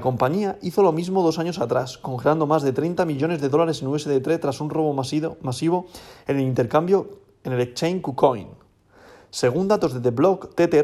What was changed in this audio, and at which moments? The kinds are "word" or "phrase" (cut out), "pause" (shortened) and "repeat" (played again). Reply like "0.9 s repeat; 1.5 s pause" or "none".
none